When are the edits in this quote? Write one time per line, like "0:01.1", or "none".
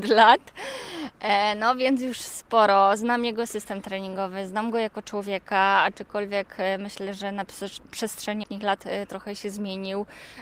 0:08.4